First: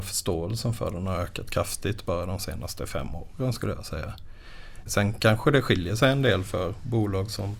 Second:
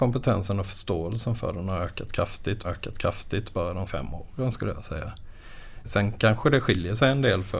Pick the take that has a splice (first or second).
second